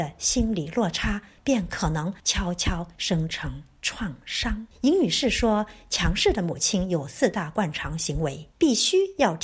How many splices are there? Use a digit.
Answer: 2